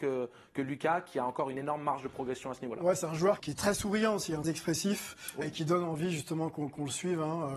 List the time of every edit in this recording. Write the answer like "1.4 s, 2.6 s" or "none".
3.4 s, 4.4 s, 5.4 s